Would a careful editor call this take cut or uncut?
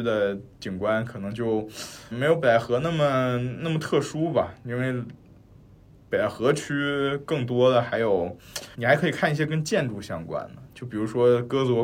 cut